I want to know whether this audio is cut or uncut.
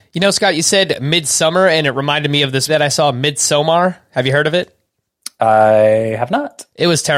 cut